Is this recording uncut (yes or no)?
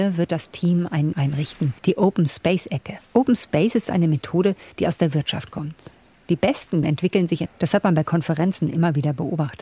no